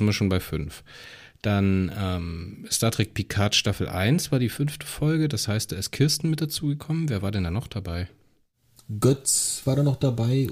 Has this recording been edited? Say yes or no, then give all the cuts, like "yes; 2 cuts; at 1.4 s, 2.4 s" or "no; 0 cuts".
no; 0 cuts